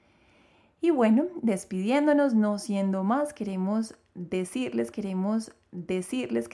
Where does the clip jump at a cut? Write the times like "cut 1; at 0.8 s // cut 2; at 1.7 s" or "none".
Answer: cut 1; at 4.9 s

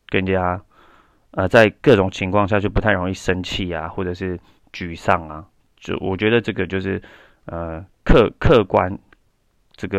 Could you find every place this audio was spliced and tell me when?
none

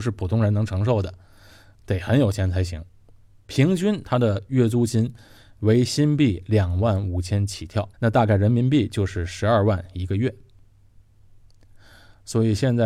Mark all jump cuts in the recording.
cut 1; at 7.9 s

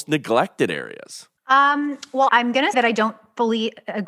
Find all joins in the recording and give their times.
cut 1; at 1.4 s // cut 2; at 2.3 s // cut 3; at 2.7 s

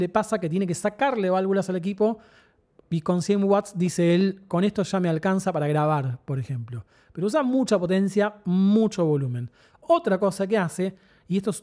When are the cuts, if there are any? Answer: none

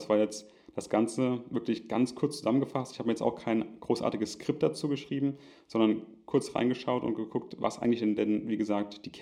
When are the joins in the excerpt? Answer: none

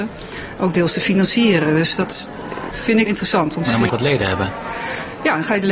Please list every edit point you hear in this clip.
cut 1; at 2.7 s // cut 2; at 3.1 s // cut 3; at 3.9 s

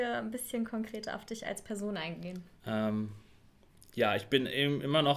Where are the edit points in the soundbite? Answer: cut 1; at 2.6 s

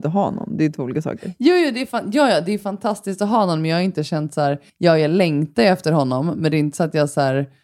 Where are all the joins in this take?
cut 1; at 4.7 s

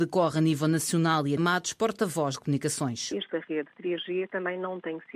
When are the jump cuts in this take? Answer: cut 1; at 1.4 s // cut 2; at 2.3 s // cut 3; at 3.3 s

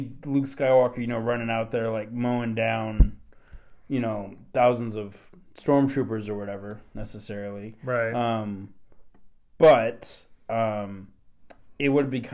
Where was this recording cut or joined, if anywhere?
none

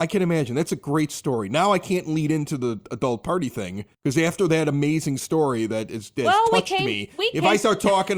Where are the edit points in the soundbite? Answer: cut 1; at 3.9 s

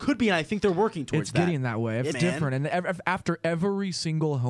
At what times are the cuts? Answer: cut 1; at 2.1 s

